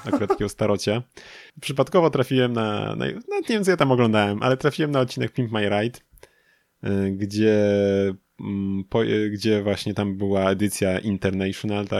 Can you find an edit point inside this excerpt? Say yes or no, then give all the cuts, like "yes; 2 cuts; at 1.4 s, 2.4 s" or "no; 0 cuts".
yes; 1 cut; at 1.5 s